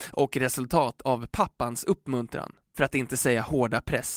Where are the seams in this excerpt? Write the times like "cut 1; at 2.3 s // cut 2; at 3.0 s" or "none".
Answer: none